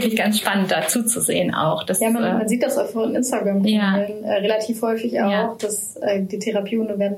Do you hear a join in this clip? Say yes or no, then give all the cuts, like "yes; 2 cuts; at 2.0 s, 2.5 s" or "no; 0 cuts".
no; 0 cuts